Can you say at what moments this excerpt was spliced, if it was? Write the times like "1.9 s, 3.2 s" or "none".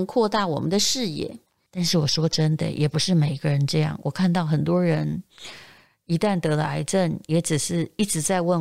none